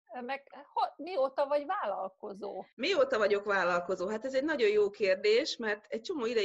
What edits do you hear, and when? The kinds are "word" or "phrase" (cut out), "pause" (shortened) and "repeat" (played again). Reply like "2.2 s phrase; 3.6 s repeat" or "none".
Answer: 2.7 s pause